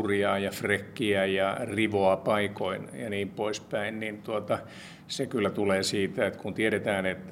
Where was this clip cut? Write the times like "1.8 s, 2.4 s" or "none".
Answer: none